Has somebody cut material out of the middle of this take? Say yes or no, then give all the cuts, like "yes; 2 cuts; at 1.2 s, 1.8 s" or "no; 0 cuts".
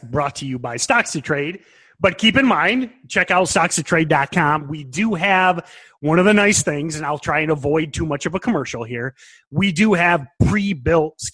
no; 0 cuts